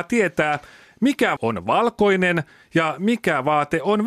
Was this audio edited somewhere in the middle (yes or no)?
yes